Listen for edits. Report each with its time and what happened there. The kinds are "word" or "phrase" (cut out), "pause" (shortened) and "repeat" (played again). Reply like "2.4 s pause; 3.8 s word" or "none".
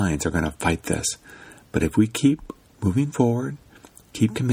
none